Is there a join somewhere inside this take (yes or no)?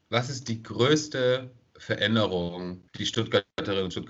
yes